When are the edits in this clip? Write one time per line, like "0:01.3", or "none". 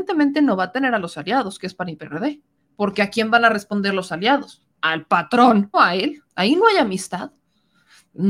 0:02.6
0:04.7
0:05.7
0:06.3